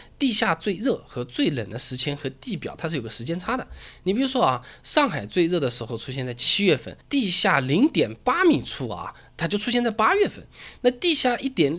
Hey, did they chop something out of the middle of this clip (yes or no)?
yes